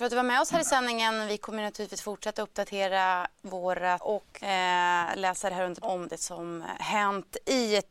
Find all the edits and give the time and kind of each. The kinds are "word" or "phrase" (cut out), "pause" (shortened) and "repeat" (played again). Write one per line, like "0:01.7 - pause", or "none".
0:04.0 - word
0:04.4 - word
0:05.8 - word